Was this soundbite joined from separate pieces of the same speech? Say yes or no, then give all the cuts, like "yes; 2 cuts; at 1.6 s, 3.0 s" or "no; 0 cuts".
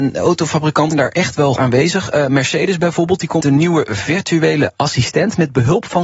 yes; 3 cuts; at 0.9 s, 1.6 s, 3.4 s